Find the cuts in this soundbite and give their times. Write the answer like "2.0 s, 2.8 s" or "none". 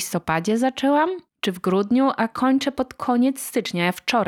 1.3 s